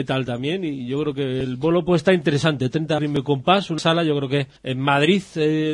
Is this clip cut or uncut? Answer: cut